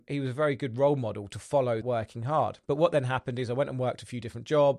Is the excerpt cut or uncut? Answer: cut